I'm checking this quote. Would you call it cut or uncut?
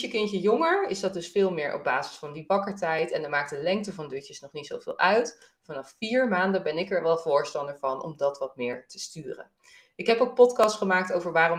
uncut